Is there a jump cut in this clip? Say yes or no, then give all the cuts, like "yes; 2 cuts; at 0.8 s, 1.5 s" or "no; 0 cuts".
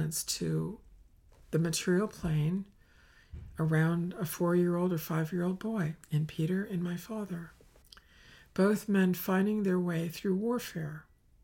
yes; 2 cuts; at 6.0 s, 7.8 s